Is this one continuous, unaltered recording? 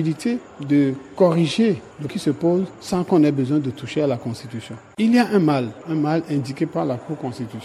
no; 1 cut; at 2.1 s

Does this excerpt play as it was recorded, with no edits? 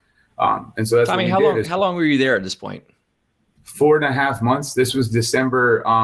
yes; 0 cuts

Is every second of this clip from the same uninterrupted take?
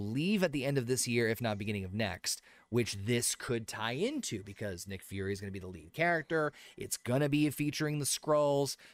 yes; 0 cuts

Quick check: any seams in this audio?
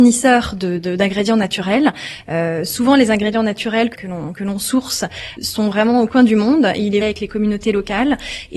yes; 4 cuts; at 3.9 s, 5.4 s, 6.1 s, 7.0 s

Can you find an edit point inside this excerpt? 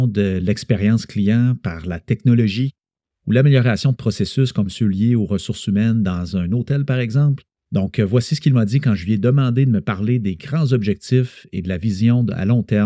yes; 1 cut; at 7.5 s

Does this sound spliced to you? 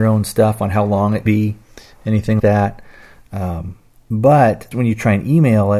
yes; 3 cuts; at 1.3 s, 2.4 s, 4.7 s

